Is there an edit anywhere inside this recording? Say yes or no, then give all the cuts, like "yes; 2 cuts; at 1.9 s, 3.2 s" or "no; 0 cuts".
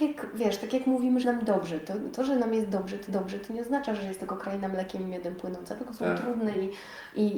yes; 2 cuts; at 1.2 s, 3.1 s